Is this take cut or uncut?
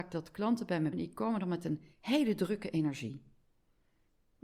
cut